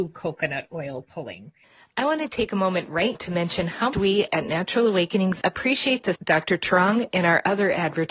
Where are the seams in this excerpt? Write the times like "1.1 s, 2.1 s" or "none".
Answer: 3.1 s, 3.9 s, 5.4 s, 6.2 s